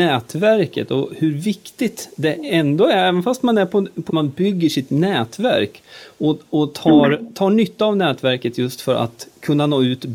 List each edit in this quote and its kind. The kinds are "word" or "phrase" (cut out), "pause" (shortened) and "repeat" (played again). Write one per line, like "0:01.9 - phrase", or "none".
0:04.1 - phrase